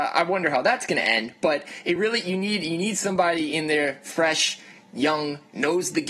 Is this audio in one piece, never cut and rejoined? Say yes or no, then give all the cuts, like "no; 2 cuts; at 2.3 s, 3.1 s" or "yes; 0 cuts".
yes; 0 cuts